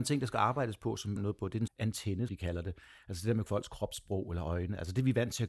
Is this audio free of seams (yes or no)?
no